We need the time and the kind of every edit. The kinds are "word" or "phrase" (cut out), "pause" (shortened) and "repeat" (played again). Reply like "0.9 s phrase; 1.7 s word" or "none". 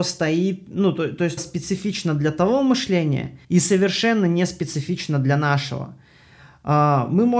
1.4 s phrase; 3.4 s pause